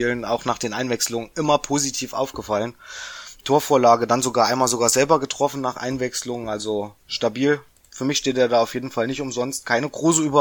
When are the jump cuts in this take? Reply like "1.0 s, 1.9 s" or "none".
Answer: 7.0 s